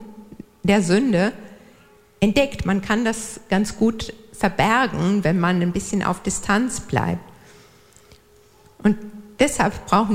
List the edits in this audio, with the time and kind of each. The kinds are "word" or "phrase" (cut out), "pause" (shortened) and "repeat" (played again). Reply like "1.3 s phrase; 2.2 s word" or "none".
none